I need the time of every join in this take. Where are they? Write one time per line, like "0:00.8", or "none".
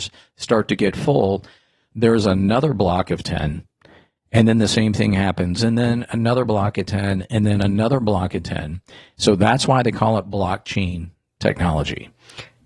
none